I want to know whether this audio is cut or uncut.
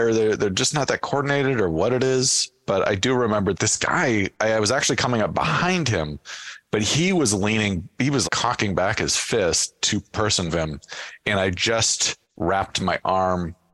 cut